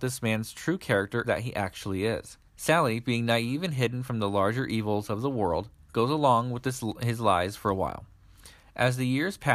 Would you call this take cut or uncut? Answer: cut